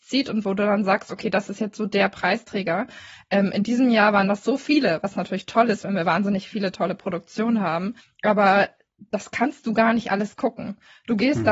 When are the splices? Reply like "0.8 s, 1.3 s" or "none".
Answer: 8.0 s